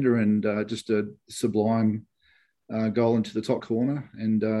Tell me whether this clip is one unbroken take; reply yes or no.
no